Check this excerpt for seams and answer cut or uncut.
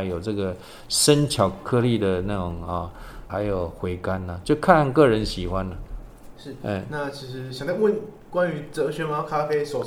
cut